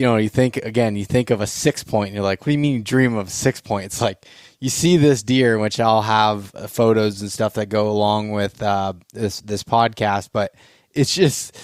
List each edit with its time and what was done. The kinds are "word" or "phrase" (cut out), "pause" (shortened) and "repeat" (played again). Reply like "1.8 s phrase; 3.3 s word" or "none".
none

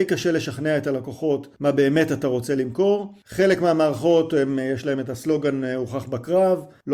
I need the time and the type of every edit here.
none

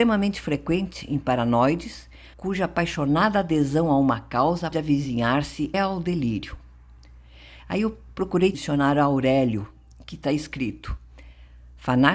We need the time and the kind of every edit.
2.3 s pause; 4.7 s word; 5.7 s word; 8.5 s phrase

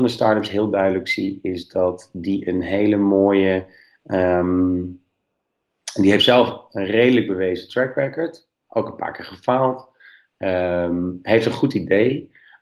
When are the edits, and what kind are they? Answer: none

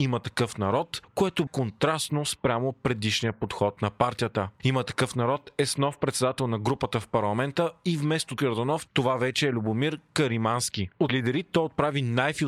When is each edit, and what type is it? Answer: 1.5 s word; 8.4 s word; 11.1 s word

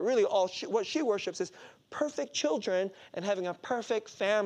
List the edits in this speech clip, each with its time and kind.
none

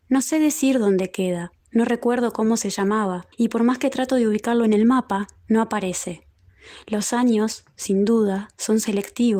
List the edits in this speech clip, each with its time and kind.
1.6 s pause; 3.3 s pause

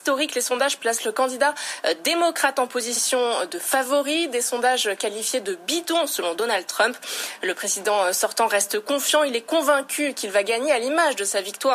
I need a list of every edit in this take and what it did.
none

